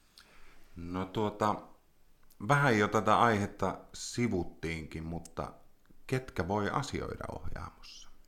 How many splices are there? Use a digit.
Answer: 0